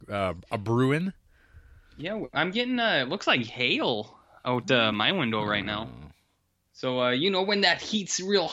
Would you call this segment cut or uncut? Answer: uncut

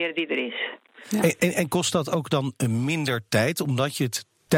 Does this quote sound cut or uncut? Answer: uncut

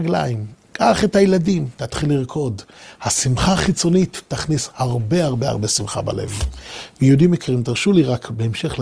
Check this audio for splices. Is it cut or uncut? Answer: uncut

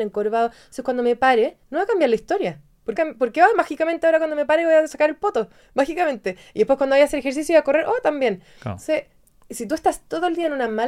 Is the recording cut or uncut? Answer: cut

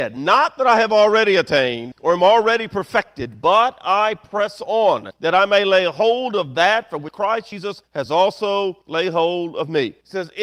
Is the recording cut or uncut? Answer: uncut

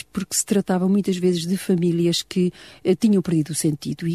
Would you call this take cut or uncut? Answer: uncut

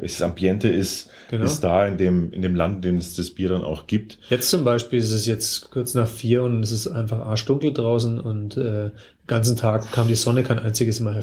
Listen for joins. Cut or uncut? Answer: uncut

